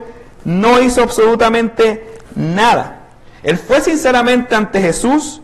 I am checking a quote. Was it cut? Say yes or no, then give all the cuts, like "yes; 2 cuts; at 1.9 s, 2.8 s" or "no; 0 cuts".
no; 0 cuts